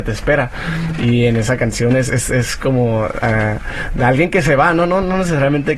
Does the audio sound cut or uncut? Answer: uncut